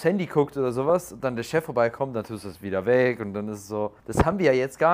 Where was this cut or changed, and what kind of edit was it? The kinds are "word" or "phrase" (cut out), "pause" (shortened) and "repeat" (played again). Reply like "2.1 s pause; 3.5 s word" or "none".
4.0 s pause

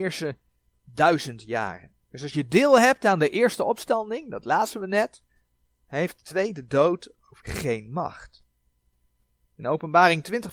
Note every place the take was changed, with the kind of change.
2.0 s pause; 6.2 s word; 7.4 s word

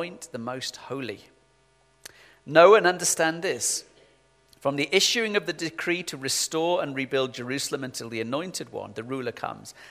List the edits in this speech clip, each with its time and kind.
none

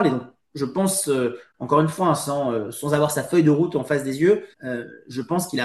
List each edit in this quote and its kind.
4.5 s pause

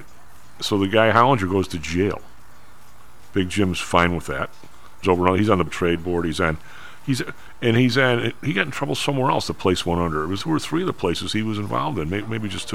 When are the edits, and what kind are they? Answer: 5.0 s phrase; 5.7 s word; 10.4 s word

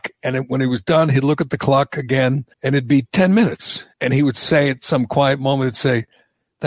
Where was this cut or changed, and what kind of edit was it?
2.5 s pause; 3.9 s pause

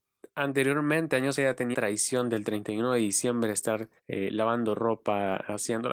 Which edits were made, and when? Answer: 1.4 s word; 1.7 s word; 4.0 s pause

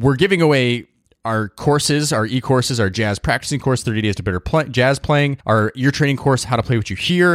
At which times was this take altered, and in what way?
5.4 s pause

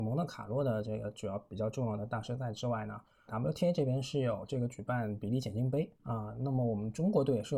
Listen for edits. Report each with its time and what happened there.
3.3 s word; 5.9 s pause

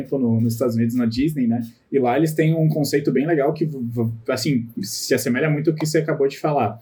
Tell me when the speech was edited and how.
none

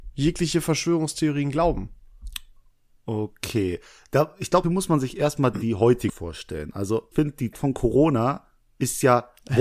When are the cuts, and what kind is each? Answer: 4.6 s word; 5.5 s word; 6.1 s word; 7.1 s word; 7.5 s word

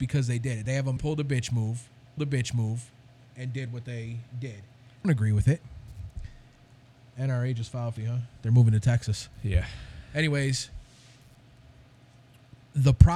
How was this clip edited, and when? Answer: 1.0 s phrase; 2.2 s repeat; 4.3 s pause; 5.0 s word; 6.9 s pause; 8.0 s word

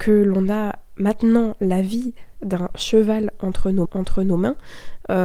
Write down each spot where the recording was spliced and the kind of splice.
3.8 s repeat

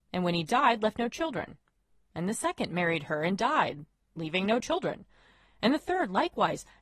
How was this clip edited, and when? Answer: none

